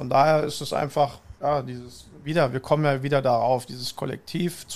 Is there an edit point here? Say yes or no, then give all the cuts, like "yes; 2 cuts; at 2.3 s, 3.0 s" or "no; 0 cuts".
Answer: yes; 1 cut; at 1.4 s